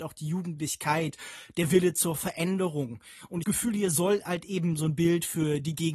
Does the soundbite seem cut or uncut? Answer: cut